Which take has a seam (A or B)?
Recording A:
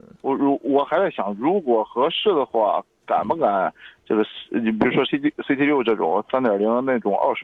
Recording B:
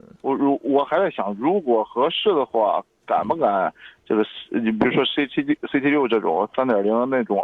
A